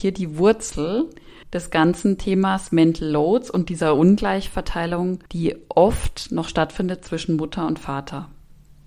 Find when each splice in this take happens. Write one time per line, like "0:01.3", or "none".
0:01.4
0:05.3